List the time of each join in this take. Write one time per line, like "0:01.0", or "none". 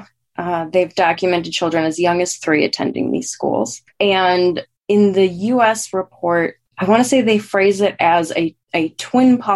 0:04.8
0:06.7
0:08.6